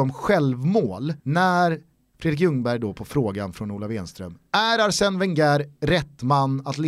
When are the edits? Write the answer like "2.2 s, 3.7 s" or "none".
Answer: 1.2 s